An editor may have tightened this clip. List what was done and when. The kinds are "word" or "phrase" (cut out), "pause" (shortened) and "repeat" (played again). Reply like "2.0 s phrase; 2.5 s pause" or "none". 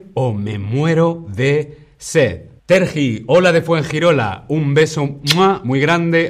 2.6 s pause